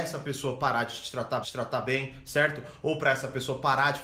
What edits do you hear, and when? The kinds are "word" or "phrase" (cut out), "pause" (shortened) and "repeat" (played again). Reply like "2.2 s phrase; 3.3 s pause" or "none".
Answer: 1.4 s repeat